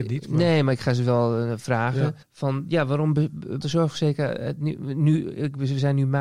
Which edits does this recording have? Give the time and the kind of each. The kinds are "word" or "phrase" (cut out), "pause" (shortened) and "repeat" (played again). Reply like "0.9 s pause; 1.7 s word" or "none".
2.2 s pause; 3.6 s word